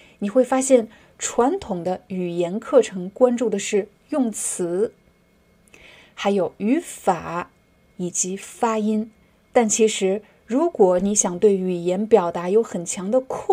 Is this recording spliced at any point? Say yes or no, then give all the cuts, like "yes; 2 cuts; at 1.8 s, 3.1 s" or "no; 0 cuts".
no; 0 cuts